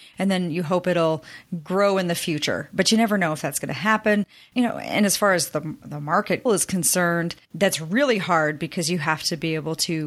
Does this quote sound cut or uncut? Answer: cut